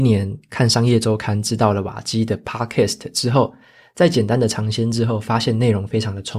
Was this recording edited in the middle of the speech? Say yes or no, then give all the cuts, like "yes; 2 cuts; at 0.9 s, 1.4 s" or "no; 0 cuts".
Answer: no; 0 cuts